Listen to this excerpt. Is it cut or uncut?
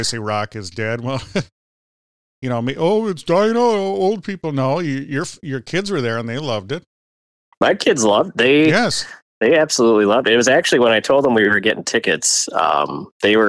uncut